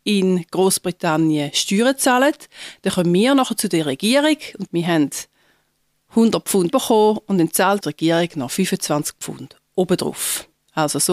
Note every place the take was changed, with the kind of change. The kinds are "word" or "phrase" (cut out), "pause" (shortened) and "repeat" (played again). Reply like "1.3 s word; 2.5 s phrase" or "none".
4.7 s word; 6.7 s word; 7.8 s word